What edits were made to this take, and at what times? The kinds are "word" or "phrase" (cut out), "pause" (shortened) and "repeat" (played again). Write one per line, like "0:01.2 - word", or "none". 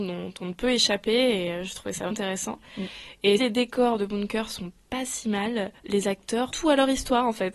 0:02.1 - word
0:03.4 - word
0:05.8 - pause
0:06.5 - phrase